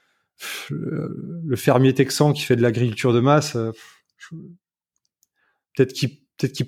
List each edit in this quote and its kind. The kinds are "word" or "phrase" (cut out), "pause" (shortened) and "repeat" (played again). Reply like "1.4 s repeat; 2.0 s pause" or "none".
none